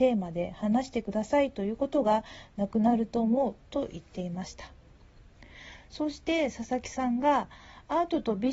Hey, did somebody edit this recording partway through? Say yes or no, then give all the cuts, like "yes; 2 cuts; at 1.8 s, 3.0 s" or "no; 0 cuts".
no; 0 cuts